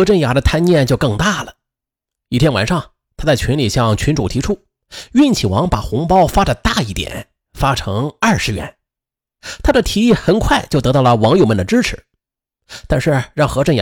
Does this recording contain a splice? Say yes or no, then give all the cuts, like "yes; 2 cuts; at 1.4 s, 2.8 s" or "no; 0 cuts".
no; 0 cuts